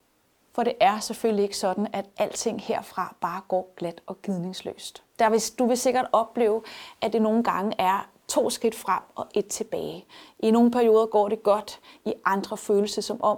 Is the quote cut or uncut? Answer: cut